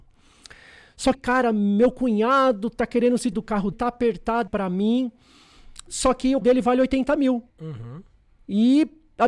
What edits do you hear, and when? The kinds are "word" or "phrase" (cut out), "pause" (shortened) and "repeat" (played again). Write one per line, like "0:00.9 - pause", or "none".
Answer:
0:01.1 - word
0:03.3 - word
0:03.7 - word
0:04.5 - phrase
0:06.4 - word
0:07.5 - pause